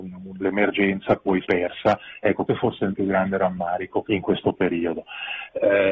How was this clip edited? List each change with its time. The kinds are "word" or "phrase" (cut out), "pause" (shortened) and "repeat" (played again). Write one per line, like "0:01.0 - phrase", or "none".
0:01.4 - phrase
0:02.5 - word
0:02.9 - word
0:04.0 - phrase